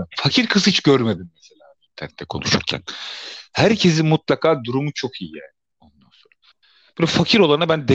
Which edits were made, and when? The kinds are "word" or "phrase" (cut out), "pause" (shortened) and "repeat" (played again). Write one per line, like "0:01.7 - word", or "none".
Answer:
none